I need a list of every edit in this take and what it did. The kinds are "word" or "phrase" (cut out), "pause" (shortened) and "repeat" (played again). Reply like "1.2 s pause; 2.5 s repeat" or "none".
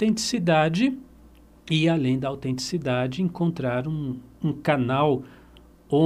none